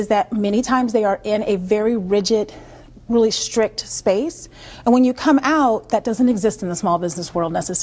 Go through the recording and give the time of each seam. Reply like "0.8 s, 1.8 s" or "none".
none

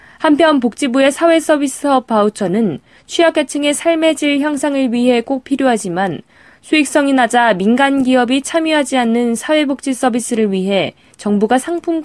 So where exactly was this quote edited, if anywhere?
none

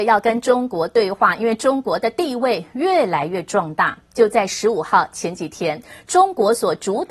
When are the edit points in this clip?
none

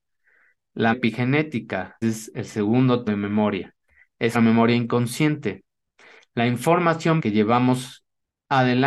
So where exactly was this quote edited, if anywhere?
0.9 s, 2.0 s, 3.1 s, 4.3 s, 7.2 s

